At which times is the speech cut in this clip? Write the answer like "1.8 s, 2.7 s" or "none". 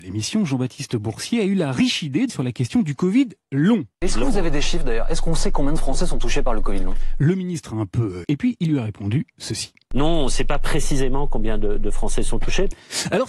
2.3 s, 3.9 s, 8.2 s